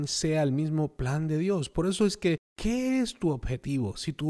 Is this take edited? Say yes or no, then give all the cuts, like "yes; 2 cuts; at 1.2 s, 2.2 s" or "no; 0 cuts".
yes; 1 cut; at 2.5 s